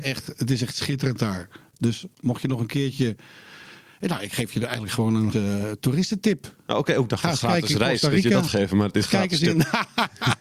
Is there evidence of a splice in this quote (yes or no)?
yes